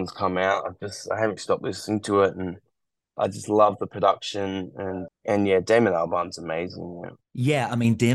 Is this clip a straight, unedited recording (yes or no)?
no